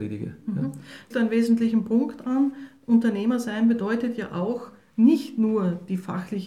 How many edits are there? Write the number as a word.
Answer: one